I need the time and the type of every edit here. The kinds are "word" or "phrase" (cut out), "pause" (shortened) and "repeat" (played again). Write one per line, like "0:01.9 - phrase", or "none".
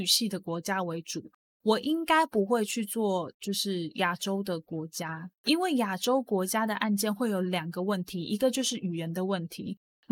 0:05.4 - pause